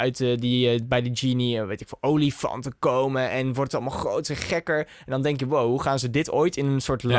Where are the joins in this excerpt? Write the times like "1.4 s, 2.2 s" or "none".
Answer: none